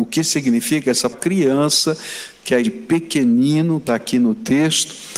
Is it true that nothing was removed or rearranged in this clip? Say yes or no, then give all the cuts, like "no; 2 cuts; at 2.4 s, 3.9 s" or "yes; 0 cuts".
no; 3 cuts; at 1.1 s, 2.6 s, 3.9 s